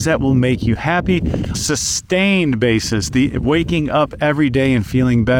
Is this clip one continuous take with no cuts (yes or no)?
no